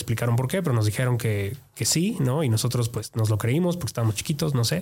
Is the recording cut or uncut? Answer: uncut